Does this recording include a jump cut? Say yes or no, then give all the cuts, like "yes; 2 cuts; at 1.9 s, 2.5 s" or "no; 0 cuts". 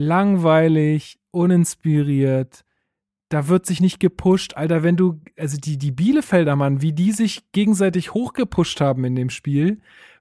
no; 0 cuts